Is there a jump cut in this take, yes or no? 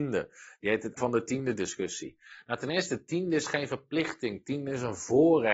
yes